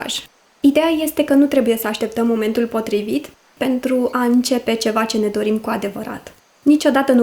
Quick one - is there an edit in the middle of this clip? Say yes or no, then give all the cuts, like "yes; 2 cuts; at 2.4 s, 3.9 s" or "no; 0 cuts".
no; 0 cuts